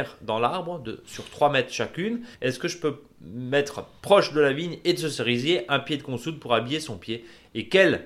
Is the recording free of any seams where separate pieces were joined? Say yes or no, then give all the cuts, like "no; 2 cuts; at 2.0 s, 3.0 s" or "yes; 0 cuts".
no; 1 cut; at 2.3 s